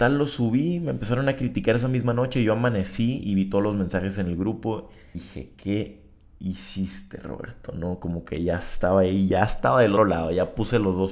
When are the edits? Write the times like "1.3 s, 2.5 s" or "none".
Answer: 5.1 s, 10.0 s